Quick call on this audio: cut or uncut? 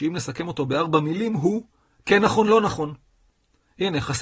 uncut